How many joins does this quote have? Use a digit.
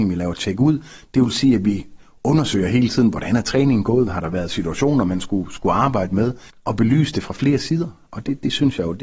0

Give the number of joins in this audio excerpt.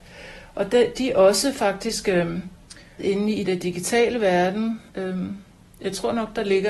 3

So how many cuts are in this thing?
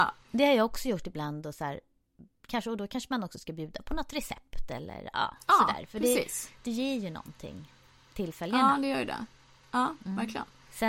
0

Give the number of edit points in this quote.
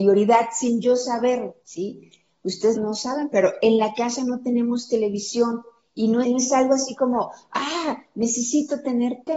3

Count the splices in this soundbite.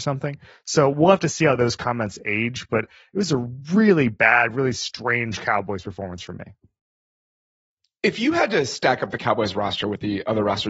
0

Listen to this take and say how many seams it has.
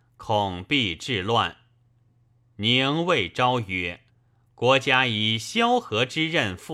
1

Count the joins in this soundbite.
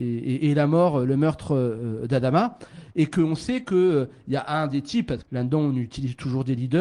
1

